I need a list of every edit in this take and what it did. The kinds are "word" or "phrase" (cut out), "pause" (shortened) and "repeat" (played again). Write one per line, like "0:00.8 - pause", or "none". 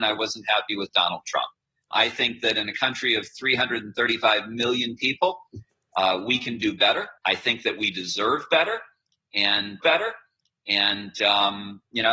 0:01.9 - word
0:07.2 - pause
0:09.8 - repeat